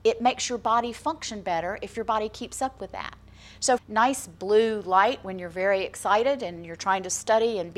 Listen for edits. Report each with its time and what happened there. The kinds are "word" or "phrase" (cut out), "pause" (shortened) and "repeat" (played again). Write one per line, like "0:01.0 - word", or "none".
0:03.8 - phrase